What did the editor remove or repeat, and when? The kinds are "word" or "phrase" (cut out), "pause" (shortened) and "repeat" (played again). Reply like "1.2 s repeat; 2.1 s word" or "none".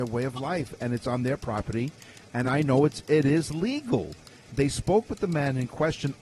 none

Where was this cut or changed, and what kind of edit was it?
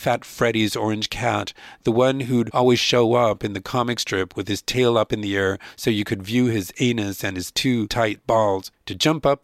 none

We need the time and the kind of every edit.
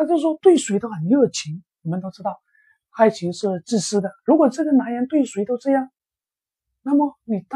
1.7 s pause; 4.2 s pause

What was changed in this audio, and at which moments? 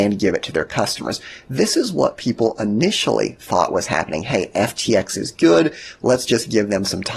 none

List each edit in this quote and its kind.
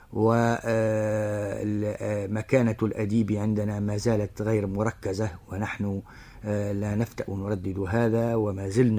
none

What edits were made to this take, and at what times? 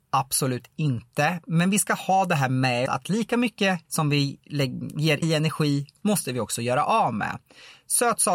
2.9 s word; 3.8 s pause; 5.2 s word

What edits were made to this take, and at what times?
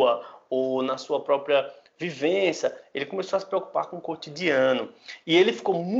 none

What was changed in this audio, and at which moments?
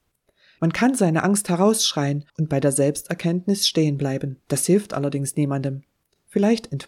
2.3 s pause; 4.4 s pause

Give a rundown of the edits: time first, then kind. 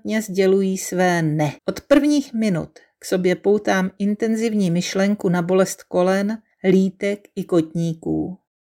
1.6 s pause

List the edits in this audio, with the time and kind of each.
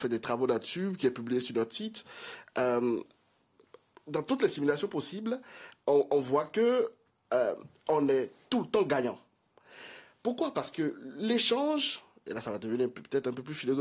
none

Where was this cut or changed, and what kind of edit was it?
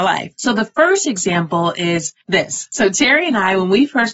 2.2 s pause

